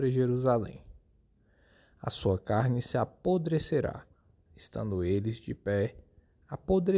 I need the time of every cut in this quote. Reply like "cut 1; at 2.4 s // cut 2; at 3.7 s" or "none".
none